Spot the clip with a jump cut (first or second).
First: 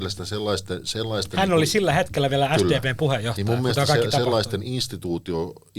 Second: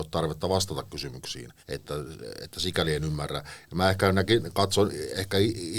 second